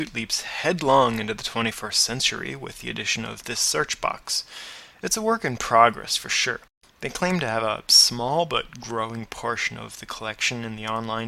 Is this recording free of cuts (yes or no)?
yes